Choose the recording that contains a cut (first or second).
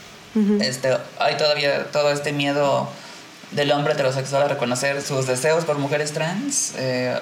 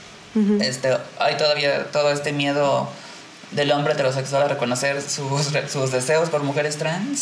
first